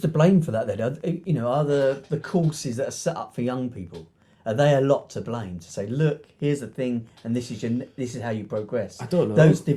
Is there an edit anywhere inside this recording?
no; 0 cuts

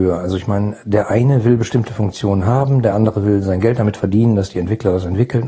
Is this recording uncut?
yes; 0 cuts

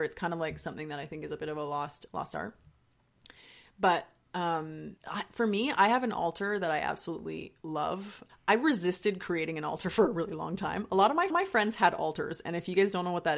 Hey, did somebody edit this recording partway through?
yes; 4 cuts; at 2.1 s, 5.0 s, 8.3 s, 11.3 s

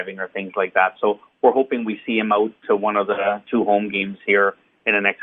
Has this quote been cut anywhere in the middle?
no; 0 cuts

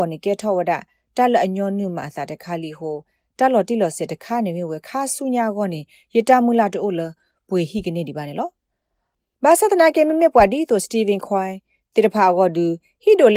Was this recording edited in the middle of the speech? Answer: no; 0 cuts

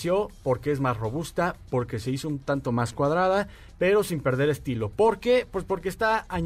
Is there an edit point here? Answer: no; 0 cuts

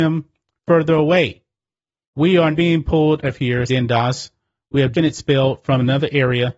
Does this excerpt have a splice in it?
yes; 5 cuts; at 2.1 s, 2.5 s, 3.2 s, 3.7 s, 4.9 s

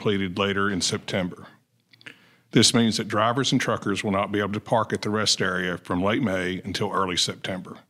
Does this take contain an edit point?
no; 0 cuts

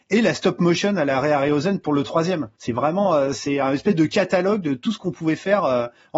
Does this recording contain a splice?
yes; 1 cut; at 2.5 s

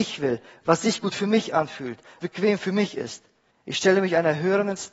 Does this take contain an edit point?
yes; 2 cuts; at 2.2 s, 3.5 s

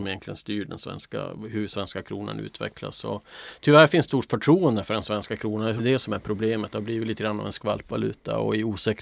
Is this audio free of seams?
no; 2 cuts; at 4.1 s, 5.8 s

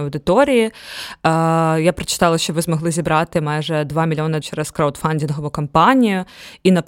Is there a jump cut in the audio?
yes; 1 cut; at 4.4 s

